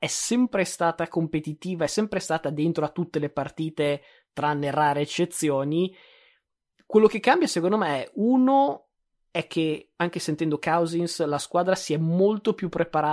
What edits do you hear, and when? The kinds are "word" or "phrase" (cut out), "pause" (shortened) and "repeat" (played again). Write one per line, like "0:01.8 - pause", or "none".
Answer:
none